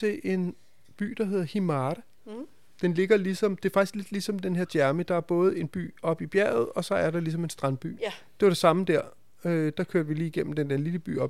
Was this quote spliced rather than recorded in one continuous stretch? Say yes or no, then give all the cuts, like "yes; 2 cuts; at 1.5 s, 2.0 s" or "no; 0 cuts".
no; 0 cuts